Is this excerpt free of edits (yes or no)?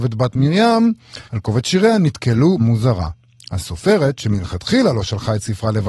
no